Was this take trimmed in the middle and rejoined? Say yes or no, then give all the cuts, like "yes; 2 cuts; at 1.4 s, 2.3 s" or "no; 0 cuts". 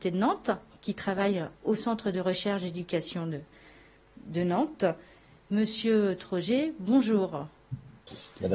no; 0 cuts